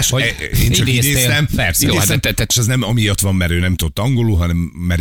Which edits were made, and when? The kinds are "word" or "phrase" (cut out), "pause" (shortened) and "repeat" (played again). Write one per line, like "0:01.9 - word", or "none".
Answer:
0:02.5 - word

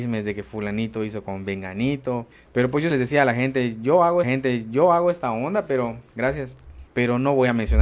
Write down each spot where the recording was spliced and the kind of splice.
0:02.3 - pause
0:02.9 - word
0:04.2 - repeat
0:06.9 - pause

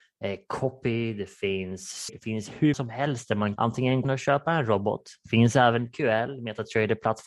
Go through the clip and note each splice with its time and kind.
0:02.1 - word
0:02.7 - word
0:03.6 - word
0:04.0 - word
0:05.8 - word

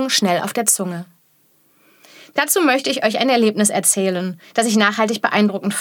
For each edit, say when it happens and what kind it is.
none

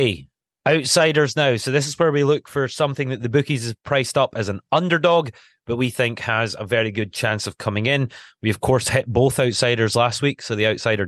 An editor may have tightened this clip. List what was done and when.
none

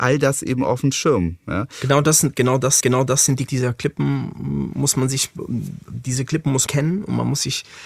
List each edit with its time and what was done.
0:02.8 - repeat
0:03.5 - phrase
0:06.7 - word

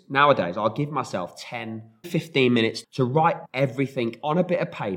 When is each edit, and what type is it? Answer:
0:02.0 - word
0:02.8 - word
0:03.5 - word

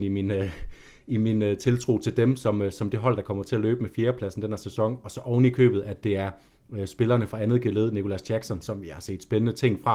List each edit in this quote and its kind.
none

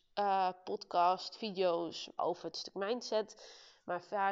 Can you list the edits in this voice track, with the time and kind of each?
0:02.2 - phrase

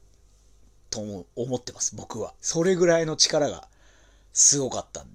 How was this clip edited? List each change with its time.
0:02.4 - pause

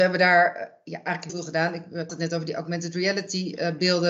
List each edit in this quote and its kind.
0:01.3 - word
0:02.1 - word

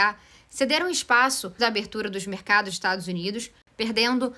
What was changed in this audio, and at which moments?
0:01.6 - word
0:02.7 - word

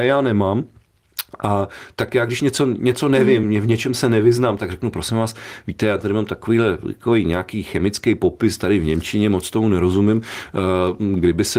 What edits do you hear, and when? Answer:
none

